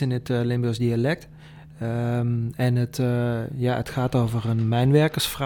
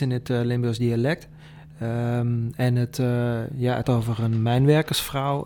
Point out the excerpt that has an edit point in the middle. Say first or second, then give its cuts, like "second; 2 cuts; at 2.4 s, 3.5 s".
second; 1 cut; at 3.8 s